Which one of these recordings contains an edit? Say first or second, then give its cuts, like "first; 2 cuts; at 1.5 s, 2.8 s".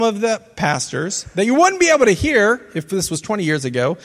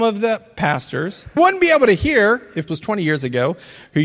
second; 2 cuts; at 1.4 s, 2.7 s